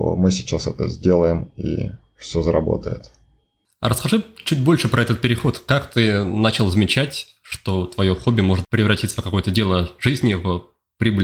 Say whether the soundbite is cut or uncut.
uncut